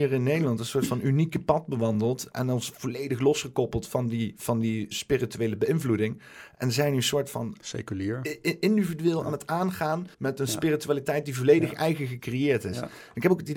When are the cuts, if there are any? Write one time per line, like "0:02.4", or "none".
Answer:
0:04.9
0:10.1

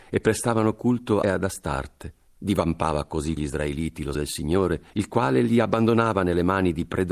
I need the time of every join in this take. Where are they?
0:01.2
0:02.3
0:03.4
0:04.1
0:04.9

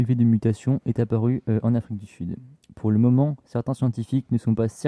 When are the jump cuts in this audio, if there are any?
none

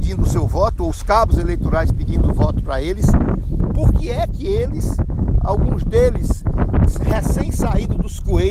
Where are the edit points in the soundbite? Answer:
none

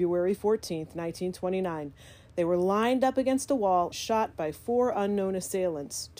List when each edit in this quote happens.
0:03.9

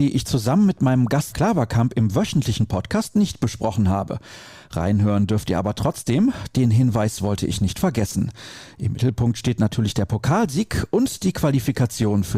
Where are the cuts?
0:01.3

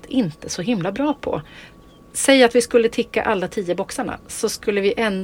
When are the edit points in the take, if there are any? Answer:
none

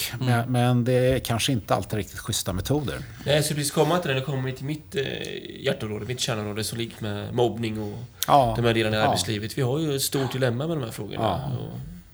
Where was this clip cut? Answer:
0:07.0

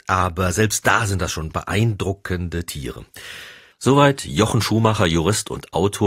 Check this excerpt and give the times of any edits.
none

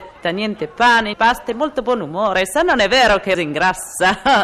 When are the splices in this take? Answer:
0:01.1
0:03.3

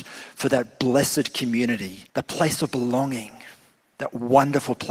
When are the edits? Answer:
0:02.1

